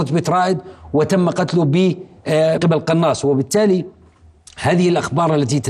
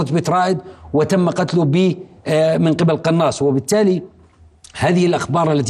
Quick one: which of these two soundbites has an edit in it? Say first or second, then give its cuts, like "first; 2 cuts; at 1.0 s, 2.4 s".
first; 1 cut; at 2.6 s